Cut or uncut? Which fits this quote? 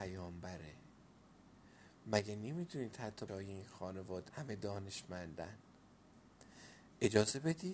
cut